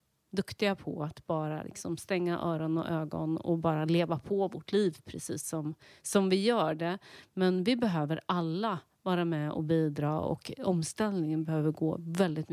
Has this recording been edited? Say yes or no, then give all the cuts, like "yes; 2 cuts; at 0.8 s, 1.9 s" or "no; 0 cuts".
no; 0 cuts